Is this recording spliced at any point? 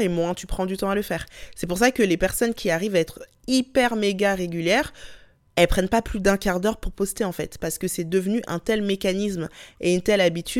no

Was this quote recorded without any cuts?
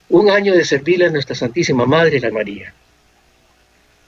no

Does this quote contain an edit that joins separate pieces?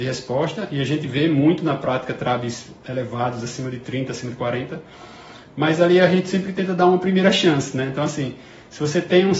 no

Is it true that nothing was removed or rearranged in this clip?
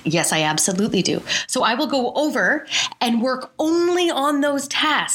yes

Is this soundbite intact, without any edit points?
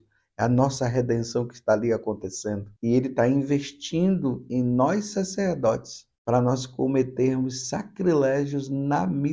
no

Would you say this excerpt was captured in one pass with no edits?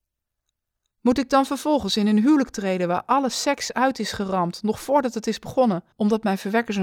no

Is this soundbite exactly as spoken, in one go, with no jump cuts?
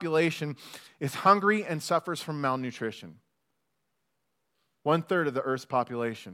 yes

